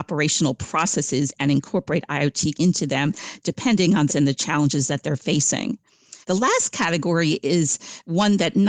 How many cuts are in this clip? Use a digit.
3